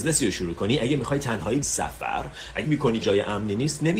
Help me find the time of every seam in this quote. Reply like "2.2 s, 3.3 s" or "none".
1.6 s, 2.6 s, 3.0 s